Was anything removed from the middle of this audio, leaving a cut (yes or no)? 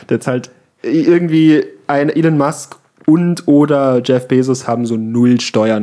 no